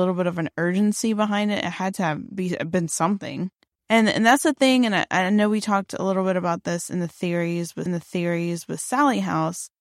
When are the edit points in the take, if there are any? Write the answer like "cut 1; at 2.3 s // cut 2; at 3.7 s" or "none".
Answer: cut 1; at 3.7 s // cut 2; at 7.9 s